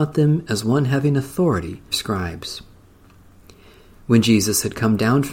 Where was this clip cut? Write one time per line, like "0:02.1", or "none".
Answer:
0:01.9